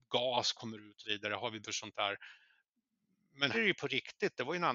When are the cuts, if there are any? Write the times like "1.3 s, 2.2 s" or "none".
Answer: 1.0 s, 1.6 s, 3.5 s